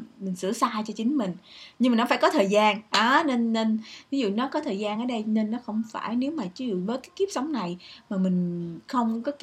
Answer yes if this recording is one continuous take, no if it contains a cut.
yes